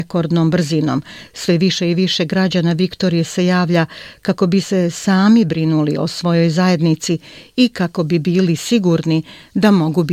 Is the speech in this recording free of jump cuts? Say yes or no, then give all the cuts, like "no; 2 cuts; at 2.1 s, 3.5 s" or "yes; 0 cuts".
yes; 0 cuts